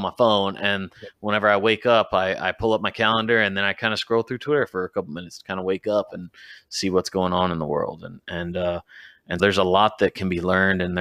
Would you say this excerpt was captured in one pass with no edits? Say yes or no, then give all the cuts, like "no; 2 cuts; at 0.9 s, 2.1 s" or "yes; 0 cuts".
no; 1 cut; at 9.4 s